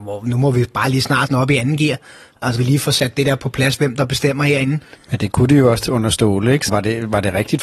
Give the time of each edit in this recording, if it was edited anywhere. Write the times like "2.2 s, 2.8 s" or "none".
1.3 s, 2.6 s, 5.9 s, 6.7 s